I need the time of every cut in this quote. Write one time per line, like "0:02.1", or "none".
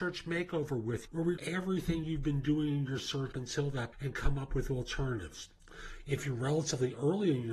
0:01.1
0:01.4
0:03.3
0:03.9